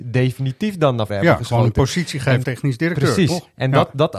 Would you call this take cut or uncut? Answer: cut